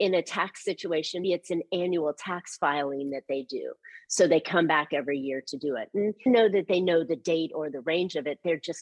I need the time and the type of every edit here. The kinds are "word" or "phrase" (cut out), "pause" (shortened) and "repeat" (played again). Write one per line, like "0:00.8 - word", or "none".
0:01.2 - word
0:06.3 - word

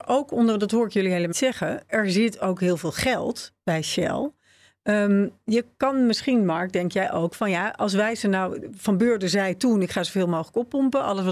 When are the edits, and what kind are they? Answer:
0:01.3 - word
0:01.9 - word

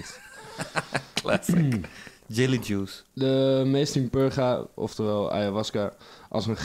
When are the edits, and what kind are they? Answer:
0:03.9 - word

